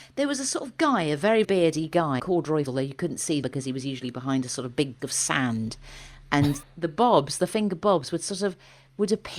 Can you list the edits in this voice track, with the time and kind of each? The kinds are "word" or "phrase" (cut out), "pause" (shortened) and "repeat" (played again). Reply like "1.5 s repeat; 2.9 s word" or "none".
1.4 s word; 2.2 s word; 2.7 s word; 3.4 s word; 5.0 s word; 6.6 s word